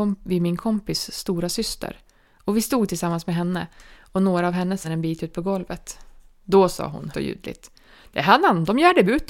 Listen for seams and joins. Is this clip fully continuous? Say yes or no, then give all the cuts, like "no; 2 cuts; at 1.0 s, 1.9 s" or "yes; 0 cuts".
no; 2 cuts; at 4.8 s, 7.1 s